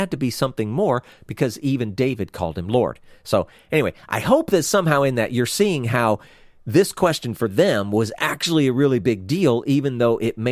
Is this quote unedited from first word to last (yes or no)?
yes